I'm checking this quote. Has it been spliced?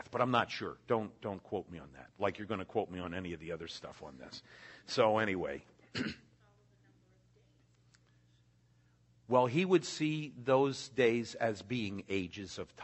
no; 0 cuts

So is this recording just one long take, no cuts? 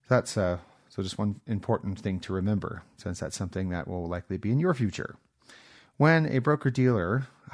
yes; 0 cuts

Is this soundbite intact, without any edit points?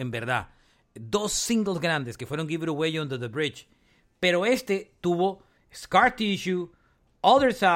yes; 0 cuts

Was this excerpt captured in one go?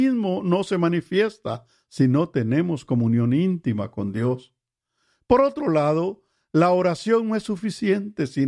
yes; 0 cuts

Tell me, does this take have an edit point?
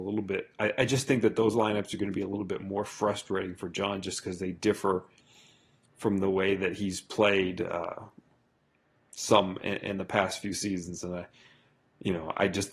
no; 0 cuts

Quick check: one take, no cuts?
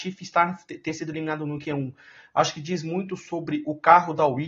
yes; 0 cuts

